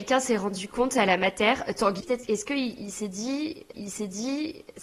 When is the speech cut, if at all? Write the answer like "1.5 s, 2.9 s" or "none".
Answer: 2.0 s, 3.7 s